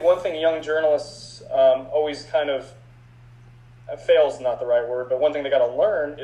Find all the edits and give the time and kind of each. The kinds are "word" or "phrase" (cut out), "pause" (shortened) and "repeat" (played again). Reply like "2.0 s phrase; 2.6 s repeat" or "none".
none